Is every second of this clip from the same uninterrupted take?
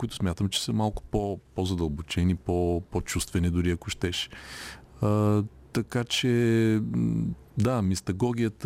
no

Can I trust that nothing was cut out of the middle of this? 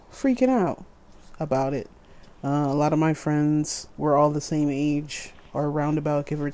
no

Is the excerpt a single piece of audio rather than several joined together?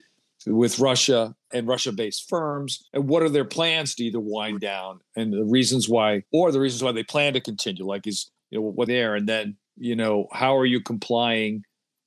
no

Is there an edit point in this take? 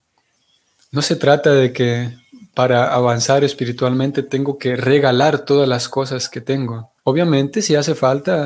yes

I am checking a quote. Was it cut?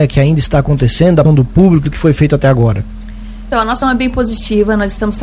yes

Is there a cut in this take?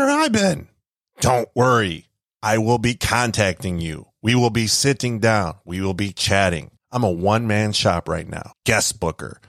no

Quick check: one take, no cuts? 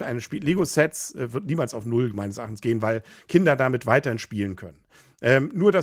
yes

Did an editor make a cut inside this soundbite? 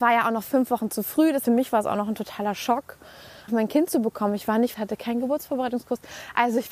yes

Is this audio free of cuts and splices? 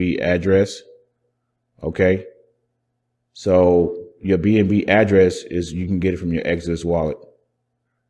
yes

